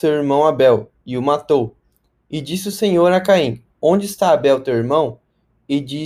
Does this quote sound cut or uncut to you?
uncut